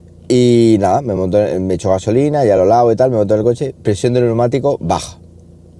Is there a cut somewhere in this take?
no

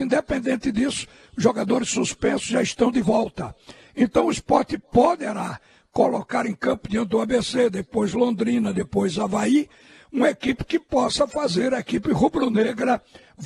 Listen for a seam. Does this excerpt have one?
no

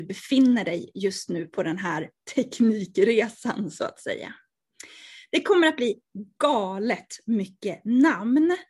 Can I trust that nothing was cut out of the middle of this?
yes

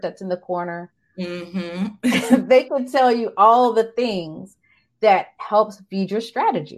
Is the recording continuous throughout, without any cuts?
yes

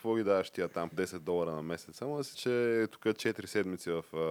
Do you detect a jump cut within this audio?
yes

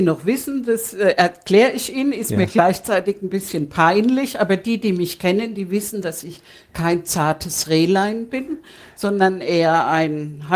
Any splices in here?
no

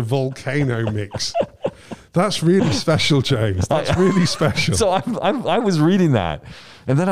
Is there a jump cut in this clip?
no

